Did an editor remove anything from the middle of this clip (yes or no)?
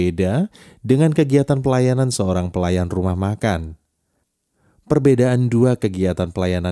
no